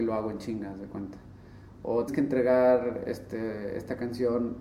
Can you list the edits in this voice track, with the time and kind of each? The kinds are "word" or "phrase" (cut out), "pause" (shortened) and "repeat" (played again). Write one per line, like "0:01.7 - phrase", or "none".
0:02.1 - word